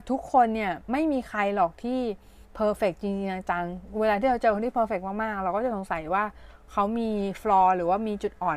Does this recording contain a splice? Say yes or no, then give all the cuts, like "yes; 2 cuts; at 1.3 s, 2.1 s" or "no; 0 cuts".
yes; 1 cut; at 2.4 s